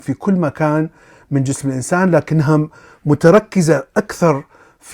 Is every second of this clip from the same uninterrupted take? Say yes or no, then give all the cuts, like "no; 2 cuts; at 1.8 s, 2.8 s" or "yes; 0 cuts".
yes; 0 cuts